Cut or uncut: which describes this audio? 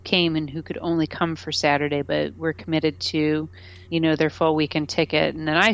cut